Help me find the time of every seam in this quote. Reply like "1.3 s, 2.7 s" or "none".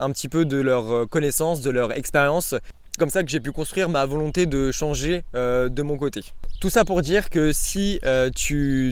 3.0 s